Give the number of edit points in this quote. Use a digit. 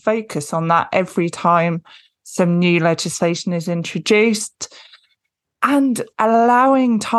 1